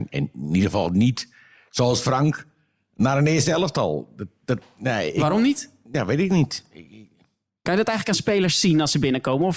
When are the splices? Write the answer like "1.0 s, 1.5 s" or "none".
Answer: none